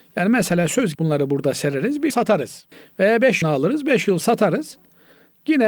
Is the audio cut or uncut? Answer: cut